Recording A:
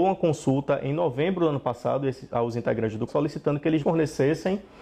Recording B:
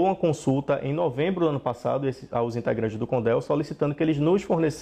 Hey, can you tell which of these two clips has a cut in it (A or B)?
A